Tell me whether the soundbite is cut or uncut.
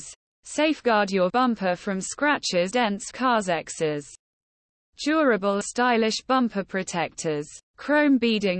cut